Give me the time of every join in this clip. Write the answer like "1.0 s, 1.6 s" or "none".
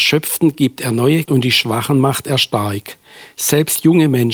1.2 s